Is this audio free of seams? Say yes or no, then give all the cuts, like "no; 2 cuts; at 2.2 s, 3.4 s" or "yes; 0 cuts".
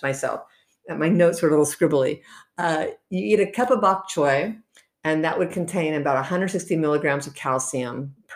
yes; 0 cuts